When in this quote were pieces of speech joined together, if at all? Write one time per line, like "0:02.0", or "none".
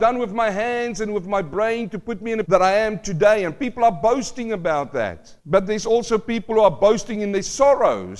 0:02.4
0:05.4